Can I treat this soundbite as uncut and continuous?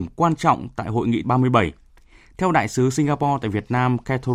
no; 1 cut; at 1.2 s

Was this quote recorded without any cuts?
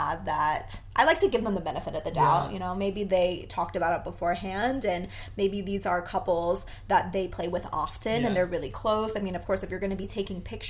yes; 0 cuts

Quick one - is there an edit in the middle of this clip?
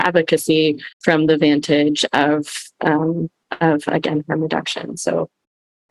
yes; 1 cut; at 0.9 s

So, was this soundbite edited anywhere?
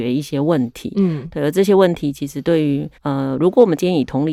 yes; 1 cut; at 3.0 s

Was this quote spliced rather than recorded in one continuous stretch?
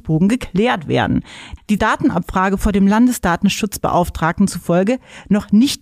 yes; 1 cut; at 1.8 s

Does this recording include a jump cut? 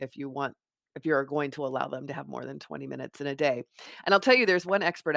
no; 0 cuts

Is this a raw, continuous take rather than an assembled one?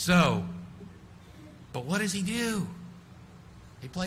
yes; 0 cuts

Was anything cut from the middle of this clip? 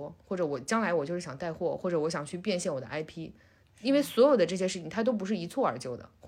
no; 0 cuts

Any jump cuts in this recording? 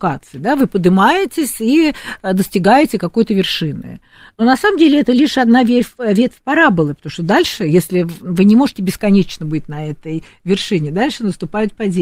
no; 0 cuts

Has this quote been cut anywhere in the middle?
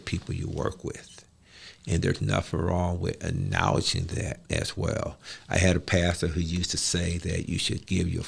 yes; 1 cut; at 4.4 s

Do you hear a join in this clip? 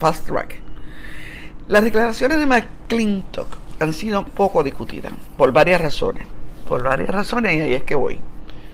yes; 1 cut; at 4.3 s

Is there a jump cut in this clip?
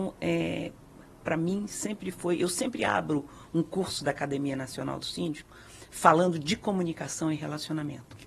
no; 0 cuts

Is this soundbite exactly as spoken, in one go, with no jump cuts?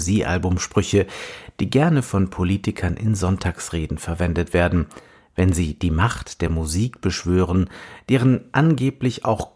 yes; 0 cuts

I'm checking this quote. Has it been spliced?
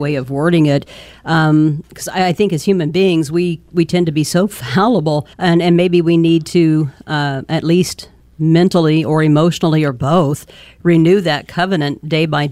yes; 1 cut; at 5.3 s

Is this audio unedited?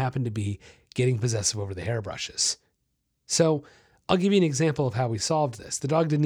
yes; 0 cuts

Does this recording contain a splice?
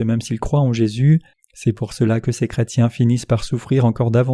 yes; 1 cut; at 1.3 s

